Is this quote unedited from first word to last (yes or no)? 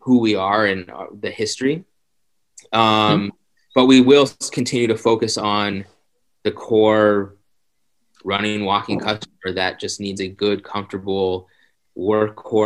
yes